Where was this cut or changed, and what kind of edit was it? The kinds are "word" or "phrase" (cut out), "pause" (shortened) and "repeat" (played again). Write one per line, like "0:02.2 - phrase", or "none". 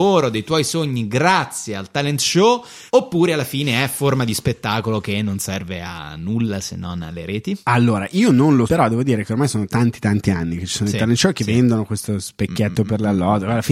0:02.9 - pause
0:07.6 - pause
0:08.7 - word